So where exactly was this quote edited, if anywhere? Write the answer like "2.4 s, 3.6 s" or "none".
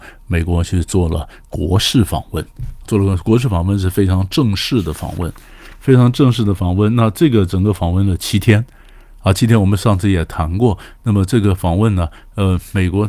2.8 s